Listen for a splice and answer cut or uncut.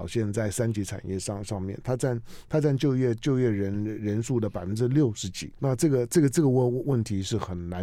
cut